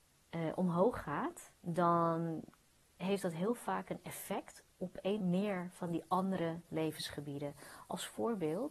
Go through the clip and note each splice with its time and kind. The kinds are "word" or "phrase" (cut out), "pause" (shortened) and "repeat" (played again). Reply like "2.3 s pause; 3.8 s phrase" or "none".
1.6 s pause; 4.7 s pause; 5.2 s word